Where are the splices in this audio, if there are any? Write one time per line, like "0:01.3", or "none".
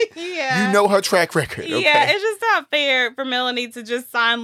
none